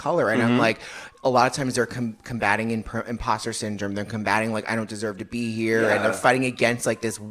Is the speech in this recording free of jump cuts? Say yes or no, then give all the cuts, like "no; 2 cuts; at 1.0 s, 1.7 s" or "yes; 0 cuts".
yes; 0 cuts